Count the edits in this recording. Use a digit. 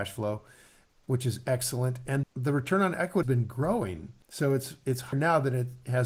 4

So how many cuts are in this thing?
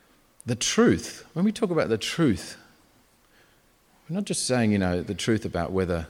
0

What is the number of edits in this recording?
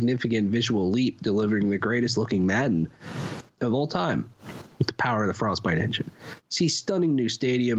0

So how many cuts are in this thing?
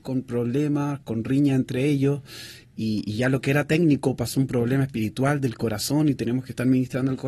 0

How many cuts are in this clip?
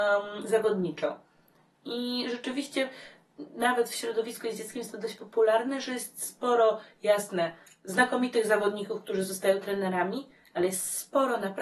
0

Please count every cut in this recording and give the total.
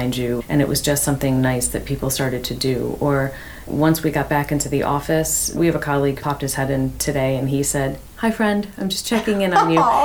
1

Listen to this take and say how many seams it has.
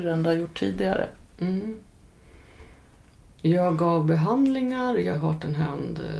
1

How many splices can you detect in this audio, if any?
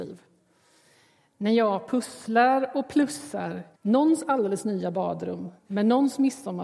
2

